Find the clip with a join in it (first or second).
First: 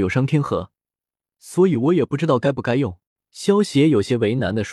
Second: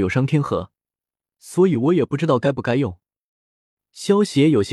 first